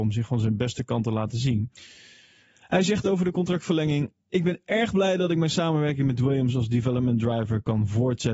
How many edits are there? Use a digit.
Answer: 0